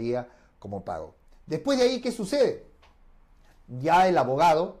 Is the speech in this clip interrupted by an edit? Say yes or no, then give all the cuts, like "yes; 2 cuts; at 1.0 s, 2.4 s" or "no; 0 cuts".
no; 0 cuts